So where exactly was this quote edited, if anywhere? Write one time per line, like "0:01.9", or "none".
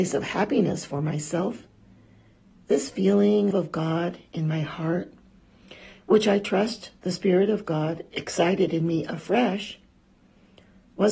0:03.5